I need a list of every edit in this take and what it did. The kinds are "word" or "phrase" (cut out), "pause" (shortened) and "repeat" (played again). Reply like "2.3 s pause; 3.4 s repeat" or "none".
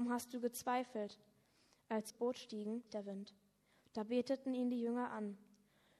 2.1 s phrase; 2.9 s phrase